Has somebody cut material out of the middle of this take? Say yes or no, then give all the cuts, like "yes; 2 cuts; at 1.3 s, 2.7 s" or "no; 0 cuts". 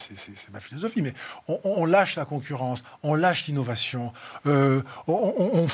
no; 0 cuts